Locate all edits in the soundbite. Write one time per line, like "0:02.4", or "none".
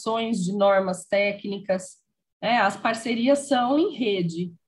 none